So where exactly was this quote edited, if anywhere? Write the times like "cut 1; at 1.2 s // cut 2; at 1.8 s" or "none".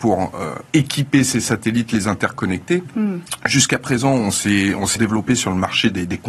cut 1; at 5.0 s